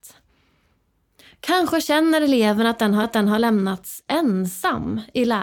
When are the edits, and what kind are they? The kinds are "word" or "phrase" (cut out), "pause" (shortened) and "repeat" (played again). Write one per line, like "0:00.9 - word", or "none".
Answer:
0:03.0 - repeat